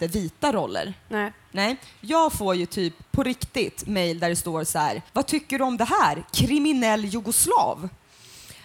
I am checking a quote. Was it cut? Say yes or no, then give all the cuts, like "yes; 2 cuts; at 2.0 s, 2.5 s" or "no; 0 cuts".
yes; 2 cuts; at 3.1 s, 5.1 s